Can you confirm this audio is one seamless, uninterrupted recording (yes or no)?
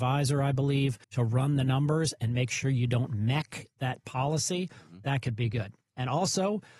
no